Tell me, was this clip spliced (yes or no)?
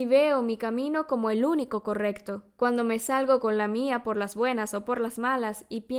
no